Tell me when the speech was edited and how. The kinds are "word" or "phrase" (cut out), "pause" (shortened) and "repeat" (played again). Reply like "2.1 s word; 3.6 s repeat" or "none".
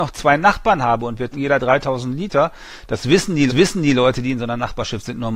1.3 s word; 3.5 s repeat